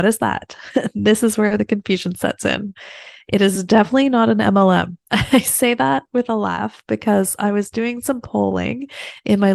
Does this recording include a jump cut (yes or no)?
yes